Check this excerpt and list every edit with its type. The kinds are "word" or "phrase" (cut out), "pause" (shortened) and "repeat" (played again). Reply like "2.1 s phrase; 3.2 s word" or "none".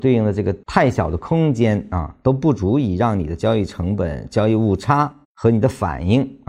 5.2 s pause